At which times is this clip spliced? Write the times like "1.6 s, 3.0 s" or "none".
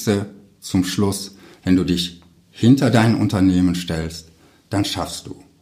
none

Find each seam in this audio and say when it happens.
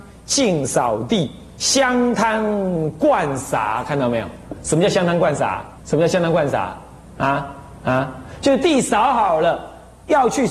5.8 s

